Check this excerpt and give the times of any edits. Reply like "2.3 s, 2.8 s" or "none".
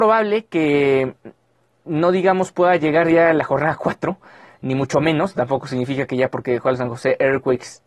none